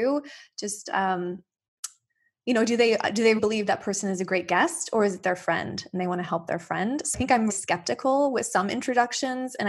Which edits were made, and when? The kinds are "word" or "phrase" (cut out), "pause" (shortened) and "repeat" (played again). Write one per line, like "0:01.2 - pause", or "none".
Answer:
0:03.4 - word
0:07.1 - word
0:07.5 - word